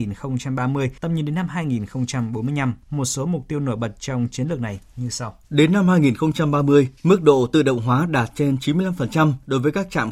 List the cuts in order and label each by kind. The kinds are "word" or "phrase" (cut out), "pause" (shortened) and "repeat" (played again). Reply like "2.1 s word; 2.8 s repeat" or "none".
1.0 s pause; 2.8 s pause; 5.4 s pause; 7.0 s pause